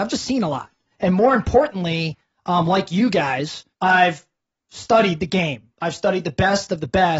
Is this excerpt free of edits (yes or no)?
no